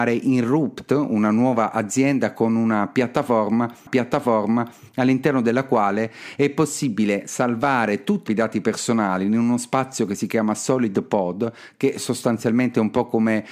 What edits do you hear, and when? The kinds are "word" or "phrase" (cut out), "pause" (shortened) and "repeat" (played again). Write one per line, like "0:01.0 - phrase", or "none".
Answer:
0:03.9 - repeat
0:08.3 - word